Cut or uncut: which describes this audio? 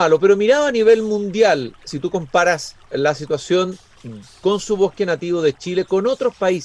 uncut